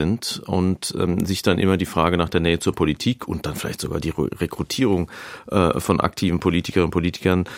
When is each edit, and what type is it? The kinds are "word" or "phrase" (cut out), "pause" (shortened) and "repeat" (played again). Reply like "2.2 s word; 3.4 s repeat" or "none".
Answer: none